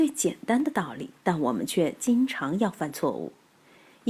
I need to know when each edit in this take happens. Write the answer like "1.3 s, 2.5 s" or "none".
1.2 s

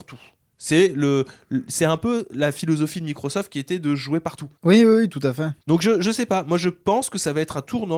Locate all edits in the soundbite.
4.6 s

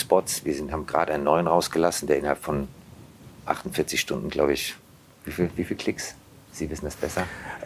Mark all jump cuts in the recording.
none

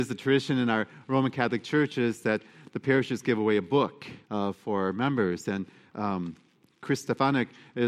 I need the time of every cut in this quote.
4.2 s

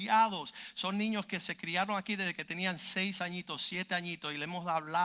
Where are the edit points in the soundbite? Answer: none

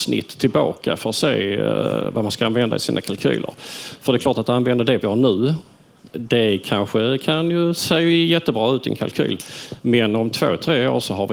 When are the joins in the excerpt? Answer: 5.0 s

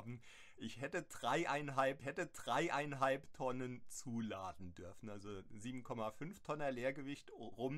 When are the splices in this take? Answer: 2.0 s

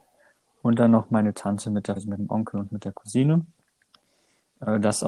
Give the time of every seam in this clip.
2.0 s

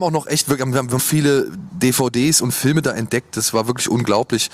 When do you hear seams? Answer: 1.0 s

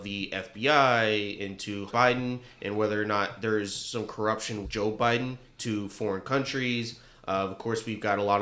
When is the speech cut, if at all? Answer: 1.9 s, 4.6 s

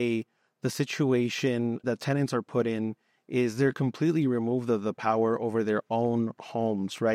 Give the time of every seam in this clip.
1.8 s

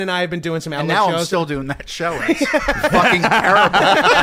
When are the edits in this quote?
none

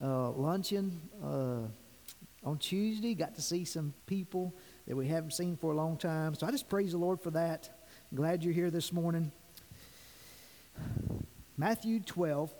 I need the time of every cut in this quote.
4.0 s, 11.5 s

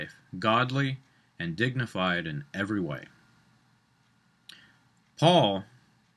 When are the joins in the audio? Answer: none

